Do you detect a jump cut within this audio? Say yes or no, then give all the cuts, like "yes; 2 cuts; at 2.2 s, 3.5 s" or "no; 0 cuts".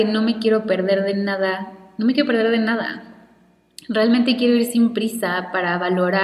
no; 0 cuts